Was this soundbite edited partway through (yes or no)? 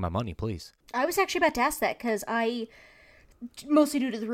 no